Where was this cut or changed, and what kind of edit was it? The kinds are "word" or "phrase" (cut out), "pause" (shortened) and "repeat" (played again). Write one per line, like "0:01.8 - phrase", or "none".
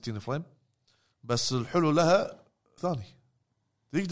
0:02.8 - word